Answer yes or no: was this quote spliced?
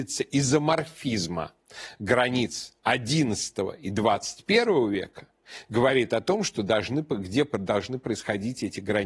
no